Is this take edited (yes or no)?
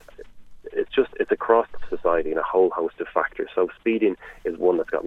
yes